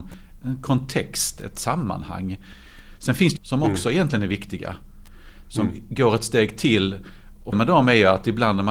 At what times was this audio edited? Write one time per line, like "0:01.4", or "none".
0:03.4
0:07.5